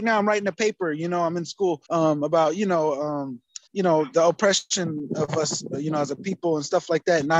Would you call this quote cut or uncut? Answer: cut